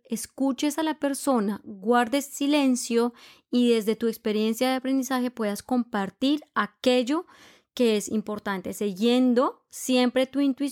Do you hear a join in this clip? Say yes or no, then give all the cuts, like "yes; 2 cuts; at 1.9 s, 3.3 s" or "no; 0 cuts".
no; 0 cuts